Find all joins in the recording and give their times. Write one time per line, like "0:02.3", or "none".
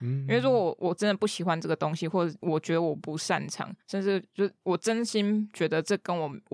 0:03.8